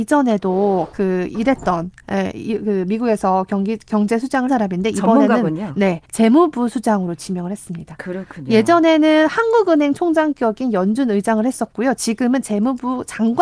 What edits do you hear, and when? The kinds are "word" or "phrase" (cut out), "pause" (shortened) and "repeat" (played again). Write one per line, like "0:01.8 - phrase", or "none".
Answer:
0:04.5 - word
0:06.0 - pause